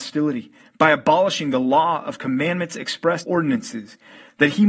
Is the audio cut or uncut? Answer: cut